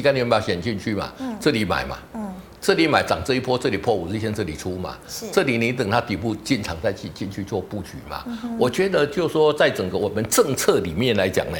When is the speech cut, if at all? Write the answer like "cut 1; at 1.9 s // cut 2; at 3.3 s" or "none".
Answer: none